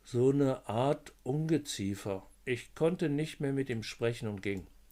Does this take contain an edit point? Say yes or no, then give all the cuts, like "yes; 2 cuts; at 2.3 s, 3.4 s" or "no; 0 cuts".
yes; 1 cut; at 2.3 s